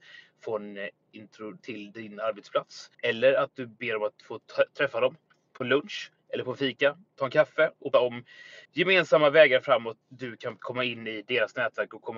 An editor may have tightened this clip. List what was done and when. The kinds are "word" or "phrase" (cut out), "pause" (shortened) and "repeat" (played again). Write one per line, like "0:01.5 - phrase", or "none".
0:01.6 - word
0:02.9 - pause
0:07.9 - word
0:08.6 - pause
0:10.0 - word
0:10.6 - phrase